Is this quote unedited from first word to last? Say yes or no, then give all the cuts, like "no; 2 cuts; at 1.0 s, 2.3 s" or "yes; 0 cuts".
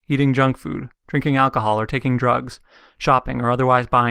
yes; 0 cuts